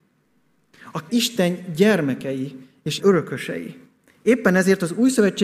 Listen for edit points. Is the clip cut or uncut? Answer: cut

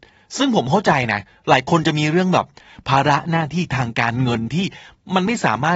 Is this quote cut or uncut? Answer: uncut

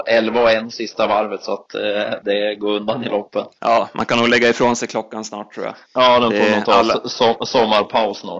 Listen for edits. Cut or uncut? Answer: cut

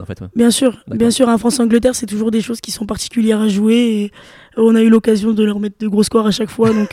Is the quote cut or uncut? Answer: uncut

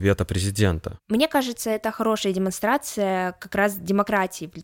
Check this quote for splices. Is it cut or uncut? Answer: uncut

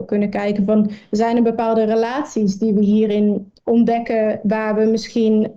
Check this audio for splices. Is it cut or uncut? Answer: cut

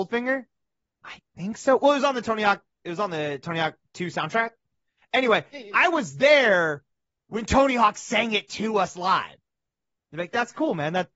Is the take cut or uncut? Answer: uncut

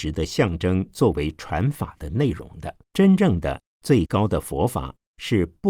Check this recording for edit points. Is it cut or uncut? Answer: cut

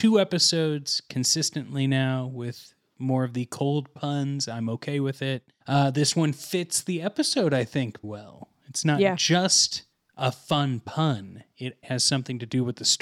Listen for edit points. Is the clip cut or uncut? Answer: cut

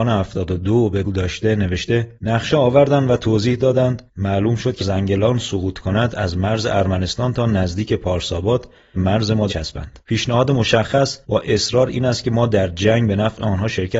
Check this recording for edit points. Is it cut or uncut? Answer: cut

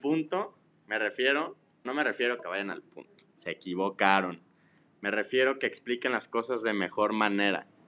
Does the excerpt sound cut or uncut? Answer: cut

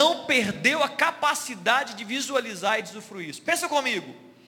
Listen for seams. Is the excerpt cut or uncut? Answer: uncut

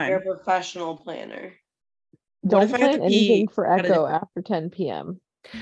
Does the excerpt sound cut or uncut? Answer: uncut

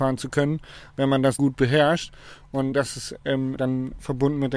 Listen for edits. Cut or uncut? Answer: cut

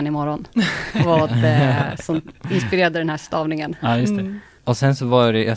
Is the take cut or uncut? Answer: uncut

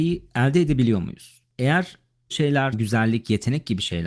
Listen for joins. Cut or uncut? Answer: cut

